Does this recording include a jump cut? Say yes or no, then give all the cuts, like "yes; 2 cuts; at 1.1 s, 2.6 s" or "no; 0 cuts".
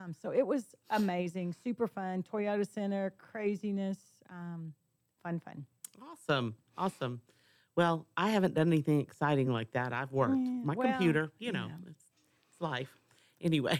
no; 0 cuts